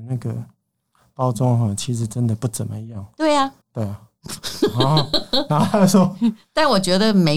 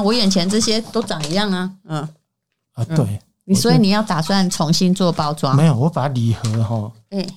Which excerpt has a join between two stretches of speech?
first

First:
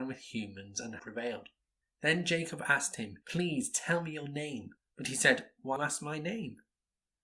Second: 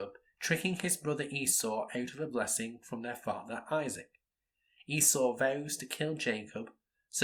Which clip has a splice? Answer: first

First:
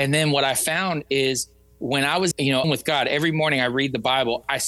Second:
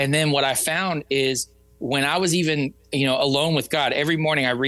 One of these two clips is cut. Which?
first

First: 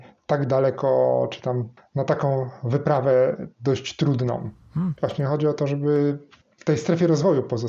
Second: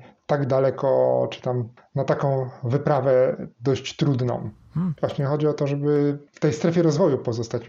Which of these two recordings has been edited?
second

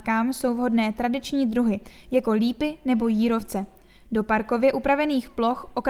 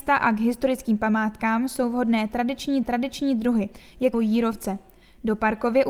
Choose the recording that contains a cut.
second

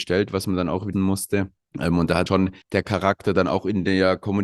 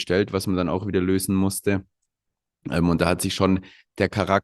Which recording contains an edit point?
first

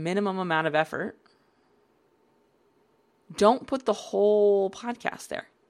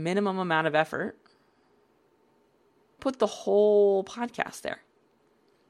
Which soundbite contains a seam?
second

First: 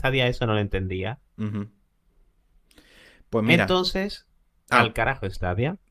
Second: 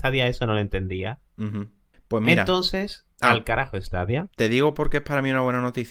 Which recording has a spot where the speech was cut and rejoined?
second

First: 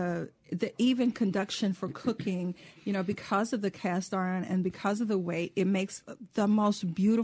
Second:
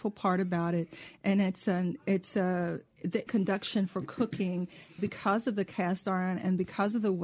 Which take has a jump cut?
second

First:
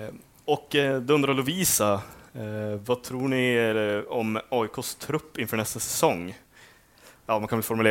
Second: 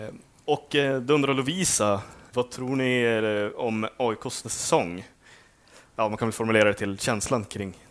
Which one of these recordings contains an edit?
second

